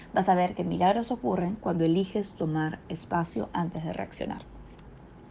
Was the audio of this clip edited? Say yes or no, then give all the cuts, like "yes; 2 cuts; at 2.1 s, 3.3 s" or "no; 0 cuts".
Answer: no; 0 cuts